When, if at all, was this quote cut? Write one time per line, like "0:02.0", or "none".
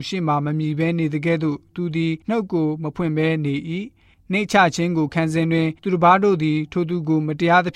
0:02.2
0:05.8

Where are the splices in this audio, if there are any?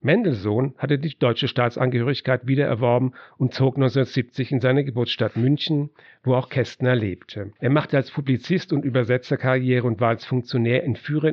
0:07.6

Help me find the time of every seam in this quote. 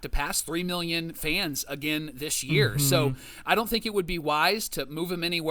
none

